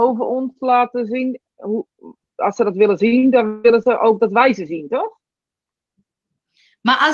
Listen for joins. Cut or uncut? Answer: uncut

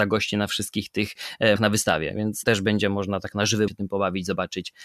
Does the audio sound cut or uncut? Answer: cut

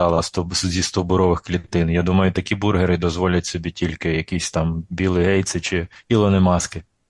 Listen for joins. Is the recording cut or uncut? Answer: uncut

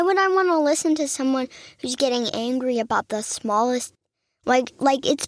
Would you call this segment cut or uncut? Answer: uncut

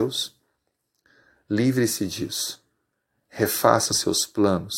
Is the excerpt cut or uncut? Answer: uncut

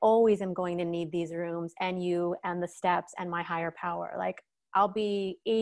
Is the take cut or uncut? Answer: uncut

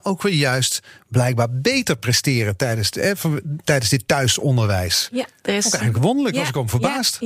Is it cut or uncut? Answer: uncut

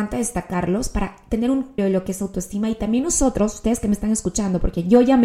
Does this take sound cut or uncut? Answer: cut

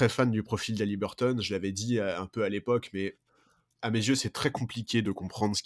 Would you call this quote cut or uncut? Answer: uncut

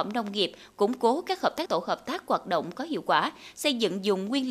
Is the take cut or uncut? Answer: cut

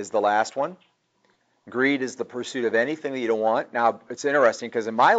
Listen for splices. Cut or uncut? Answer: cut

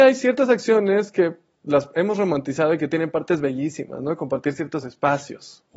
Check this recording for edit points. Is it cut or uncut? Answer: uncut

